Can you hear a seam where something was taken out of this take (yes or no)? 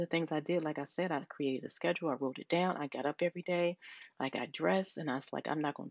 no